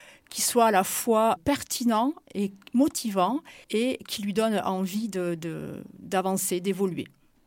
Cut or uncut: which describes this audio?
cut